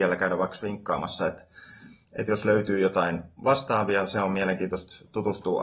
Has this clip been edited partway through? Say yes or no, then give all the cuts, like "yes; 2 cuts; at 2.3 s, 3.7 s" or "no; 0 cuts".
no; 0 cuts